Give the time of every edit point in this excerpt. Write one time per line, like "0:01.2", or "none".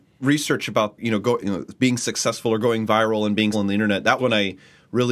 0:01.0
0:01.4
0:03.5
0:04.2

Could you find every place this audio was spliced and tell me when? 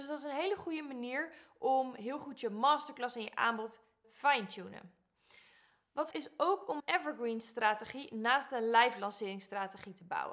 0:04.0
0:06.1
0:06.8

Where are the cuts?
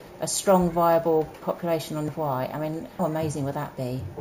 0:01.4
0:02.1
0:03.0

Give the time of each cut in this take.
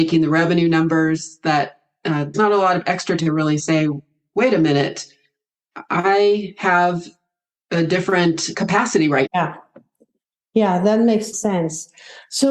0:02.3
0:03.2
0:08.5
0:09.3
0:11.3

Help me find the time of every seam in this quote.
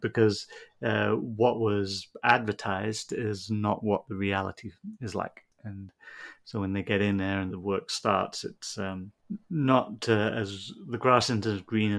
0:07.5

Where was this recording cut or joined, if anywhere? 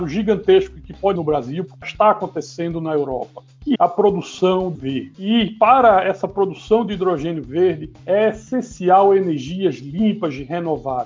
0:01.2
0:01.8
0:03.8
0:04.7

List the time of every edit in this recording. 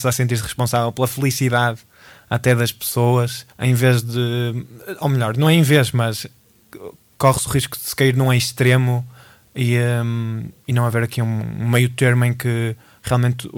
0:03.5
0:10.6

